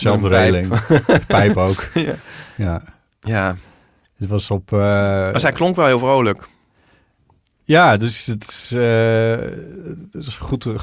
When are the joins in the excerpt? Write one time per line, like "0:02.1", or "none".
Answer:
0:03.1